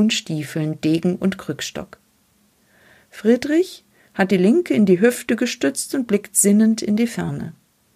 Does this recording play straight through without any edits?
yes; 0 cuts

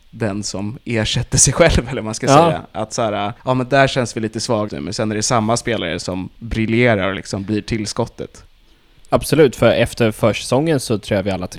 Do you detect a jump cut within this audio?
yes; 2 cuts; at 3.4 s, 4.7 s

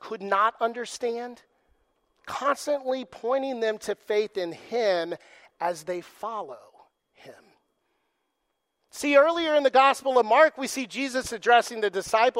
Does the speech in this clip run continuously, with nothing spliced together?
yes; 0 cuts

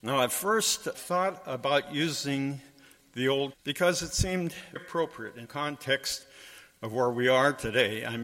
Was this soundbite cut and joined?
yes; 4 cuts; at 0.9 s, 3.5 s, 4.8 s, 5.4 s

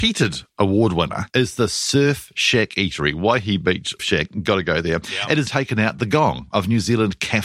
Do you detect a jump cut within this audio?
yes; 3 cuts; at 1.3 s, 4.0 s, 5.5 s

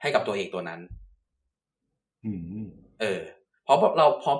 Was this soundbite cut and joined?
no; 0 cuts

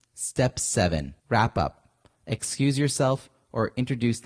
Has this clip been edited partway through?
yes; 1 cut; at 1.2 s

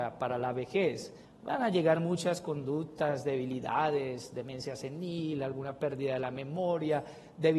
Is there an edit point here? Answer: yes; 1 cut; at 1.2 s

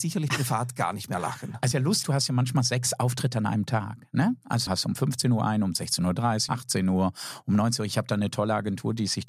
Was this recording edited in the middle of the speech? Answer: yes; 4 cuts; at 1.7 s, 2.0 s, 4.7 s, 6.5 s

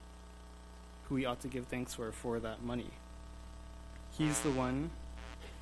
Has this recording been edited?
no; 0 cuts

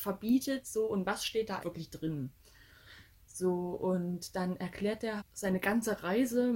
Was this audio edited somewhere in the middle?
yes; 2 cuts; at 1.6 s, 5.2 s

